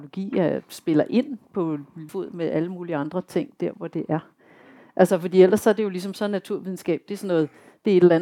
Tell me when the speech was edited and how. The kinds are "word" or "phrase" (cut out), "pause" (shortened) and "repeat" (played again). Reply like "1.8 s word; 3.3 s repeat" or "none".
2.1 s word

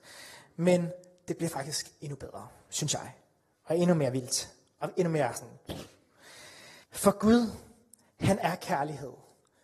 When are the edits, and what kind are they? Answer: 6.8 s pause

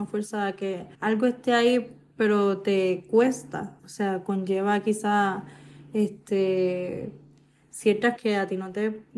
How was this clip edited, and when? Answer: 0.9 s pause; 3.8 s pause; 8.2 s word

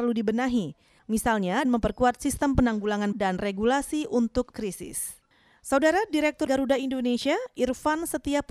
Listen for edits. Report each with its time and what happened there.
1.6 s word; 3.1 s word; 4.5 s word; 6.5 s word

